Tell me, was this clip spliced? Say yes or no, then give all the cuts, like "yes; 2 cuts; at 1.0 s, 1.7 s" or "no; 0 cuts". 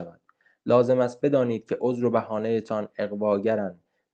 no; 0 cuts